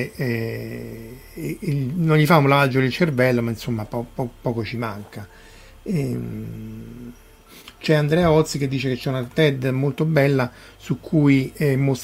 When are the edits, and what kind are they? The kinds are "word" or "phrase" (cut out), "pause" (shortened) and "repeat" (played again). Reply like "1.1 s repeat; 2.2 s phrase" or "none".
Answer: none